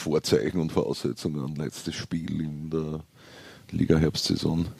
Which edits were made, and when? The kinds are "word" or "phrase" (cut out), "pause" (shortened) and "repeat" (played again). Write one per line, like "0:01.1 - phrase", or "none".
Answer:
none